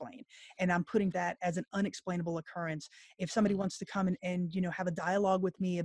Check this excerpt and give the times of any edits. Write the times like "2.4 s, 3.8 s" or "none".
1.1 s, 4.2 s